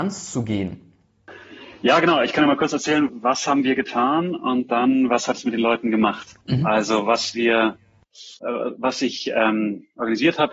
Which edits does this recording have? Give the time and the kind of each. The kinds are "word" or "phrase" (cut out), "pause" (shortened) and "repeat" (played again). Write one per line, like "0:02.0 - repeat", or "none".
0:03.1 - word
0:06.4 - pause
0:08.4 - pause